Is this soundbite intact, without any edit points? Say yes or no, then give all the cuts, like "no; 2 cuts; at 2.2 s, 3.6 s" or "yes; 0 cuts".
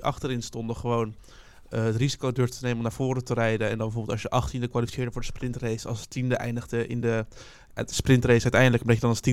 yes; 0 cuts